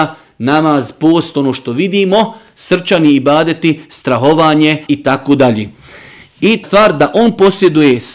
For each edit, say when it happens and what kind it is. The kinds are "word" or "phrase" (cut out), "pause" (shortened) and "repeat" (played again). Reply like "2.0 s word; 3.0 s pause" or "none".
4.9 s word; 6.6 s word